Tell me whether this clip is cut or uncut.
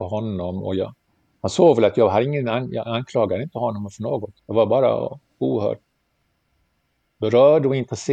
cut